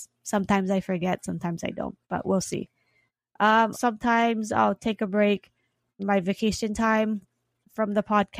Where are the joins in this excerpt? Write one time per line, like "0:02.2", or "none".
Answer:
0:02.0
0:03.7
0:06.0